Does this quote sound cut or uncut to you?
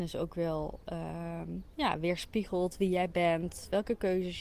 uncut